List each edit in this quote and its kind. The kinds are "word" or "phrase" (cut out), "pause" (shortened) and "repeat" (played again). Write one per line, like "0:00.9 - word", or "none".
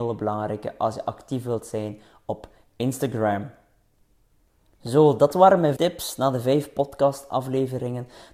0:05.8 - word